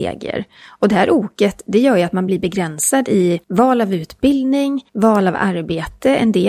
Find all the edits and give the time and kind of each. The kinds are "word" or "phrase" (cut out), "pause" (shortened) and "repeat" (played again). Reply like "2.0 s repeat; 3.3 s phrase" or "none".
3.4 s pause; 4.9 s pause